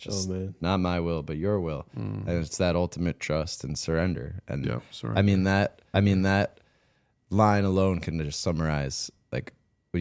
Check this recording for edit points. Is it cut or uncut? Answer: cut